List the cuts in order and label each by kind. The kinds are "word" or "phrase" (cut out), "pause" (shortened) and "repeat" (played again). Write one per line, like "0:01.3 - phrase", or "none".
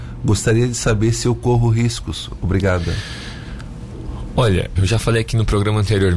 0:04.8 - word